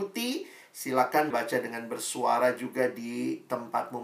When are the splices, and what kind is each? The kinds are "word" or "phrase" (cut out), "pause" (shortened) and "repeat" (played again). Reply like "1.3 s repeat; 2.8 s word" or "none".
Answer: 1.3 s word